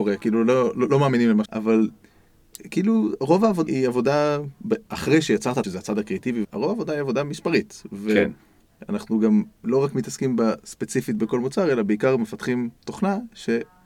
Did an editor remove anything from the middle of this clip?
yes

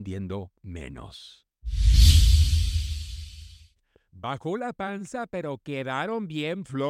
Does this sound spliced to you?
no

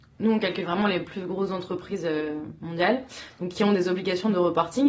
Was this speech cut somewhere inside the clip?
no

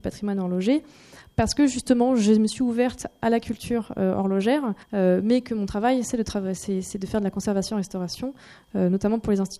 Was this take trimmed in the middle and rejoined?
yes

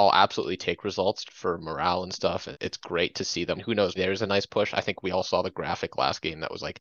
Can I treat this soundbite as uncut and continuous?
no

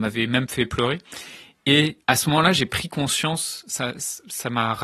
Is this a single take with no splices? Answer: no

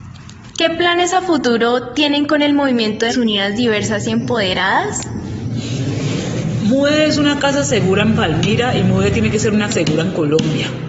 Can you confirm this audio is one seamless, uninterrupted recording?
no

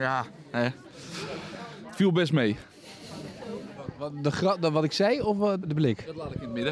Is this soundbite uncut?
no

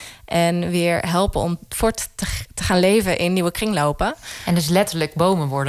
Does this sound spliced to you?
no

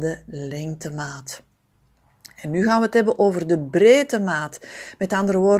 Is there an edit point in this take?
no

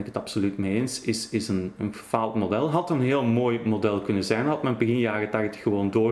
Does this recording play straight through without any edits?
yes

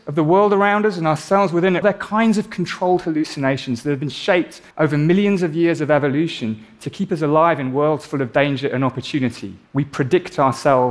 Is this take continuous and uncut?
no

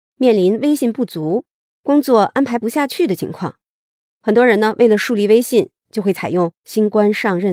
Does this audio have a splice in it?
no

